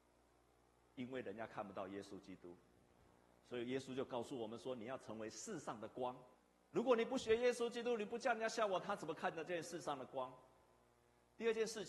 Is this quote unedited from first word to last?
no; 1 cut; at 6.3 s

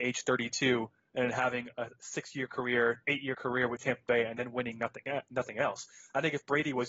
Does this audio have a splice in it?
no; 0 cuts

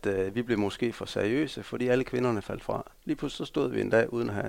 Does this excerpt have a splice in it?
yes; 1 cut; at 3.0 s

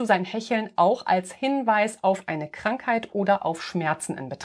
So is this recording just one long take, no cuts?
yes; 0 cuts

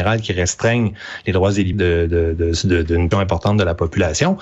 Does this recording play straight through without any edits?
no; 2 cuts; at 1.7 s, 3.1 s

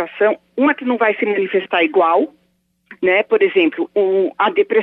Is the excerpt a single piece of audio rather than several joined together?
yes; 0 cuts

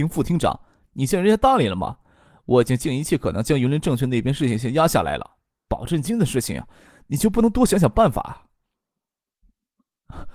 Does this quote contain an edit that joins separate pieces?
no; 0 cuts

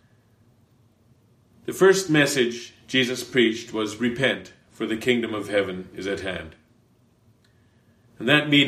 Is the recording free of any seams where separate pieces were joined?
yes; 0 cuts

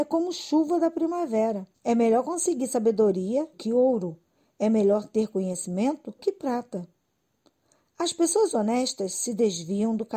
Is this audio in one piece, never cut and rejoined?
no; 3 cuts; at 1.7 s, 3.5 s, 6.2 s

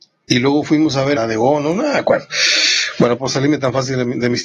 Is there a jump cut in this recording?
yes; 2 cuts; at 1.2 s, 3.2 s

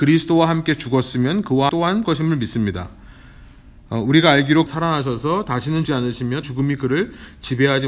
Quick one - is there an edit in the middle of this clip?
yes; 5 cuts; at 1.7 s, 2.0 s, 4.7 s, 5.8 s, 6.4 s

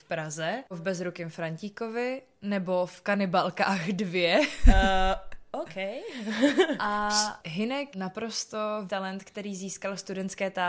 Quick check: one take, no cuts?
no; 2 cuts; at 7.9 s, 8.9 s

